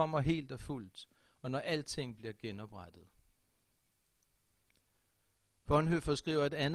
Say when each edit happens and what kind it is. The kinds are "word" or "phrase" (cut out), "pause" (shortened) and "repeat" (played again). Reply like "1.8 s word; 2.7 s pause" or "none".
none